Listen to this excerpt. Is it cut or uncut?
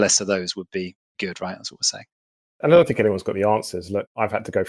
uncut